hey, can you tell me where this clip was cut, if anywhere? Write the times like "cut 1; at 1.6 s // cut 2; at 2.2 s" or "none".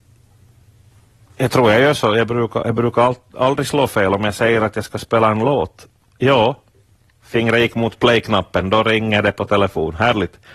none